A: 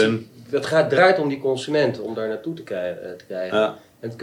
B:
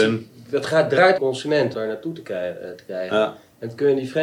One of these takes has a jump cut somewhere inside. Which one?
B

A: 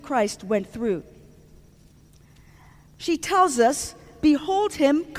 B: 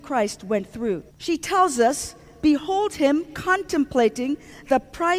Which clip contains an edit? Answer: B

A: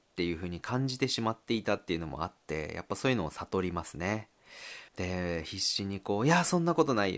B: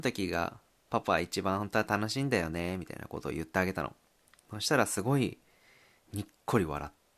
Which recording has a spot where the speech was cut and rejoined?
A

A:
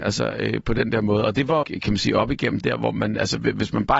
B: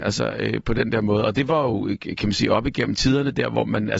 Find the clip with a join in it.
A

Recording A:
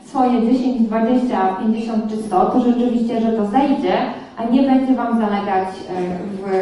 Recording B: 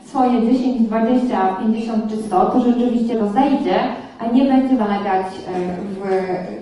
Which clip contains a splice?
B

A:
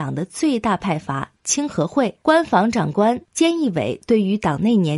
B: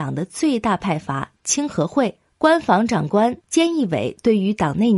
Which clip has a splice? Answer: A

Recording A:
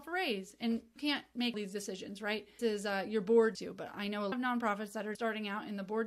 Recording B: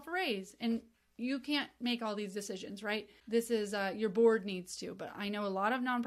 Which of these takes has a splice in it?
A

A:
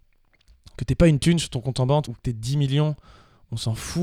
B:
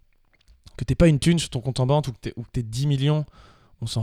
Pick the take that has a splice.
A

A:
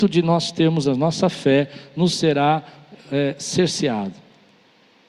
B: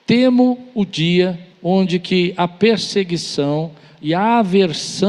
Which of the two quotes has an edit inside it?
B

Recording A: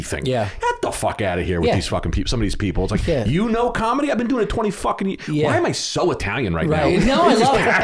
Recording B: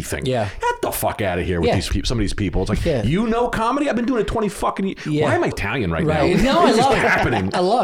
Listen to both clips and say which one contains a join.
B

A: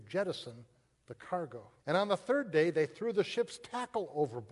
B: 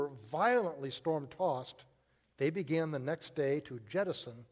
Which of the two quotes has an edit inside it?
A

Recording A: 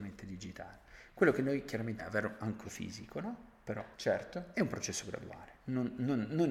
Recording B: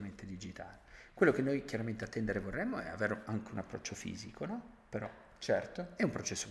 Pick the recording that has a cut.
A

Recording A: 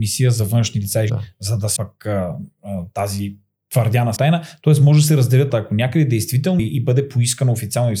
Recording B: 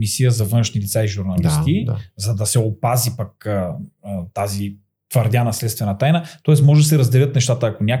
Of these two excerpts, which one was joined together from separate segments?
A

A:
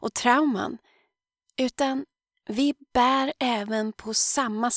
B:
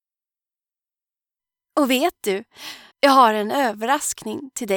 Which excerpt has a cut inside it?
B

